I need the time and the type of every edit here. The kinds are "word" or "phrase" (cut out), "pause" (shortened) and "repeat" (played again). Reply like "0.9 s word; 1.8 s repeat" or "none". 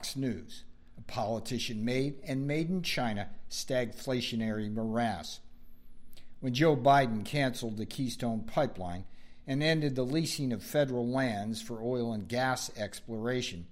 none